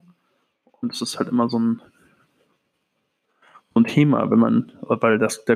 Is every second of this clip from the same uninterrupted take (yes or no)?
yes